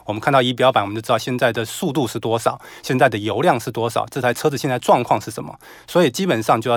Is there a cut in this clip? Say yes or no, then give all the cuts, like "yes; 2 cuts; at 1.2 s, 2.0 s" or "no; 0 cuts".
no; 0 cuts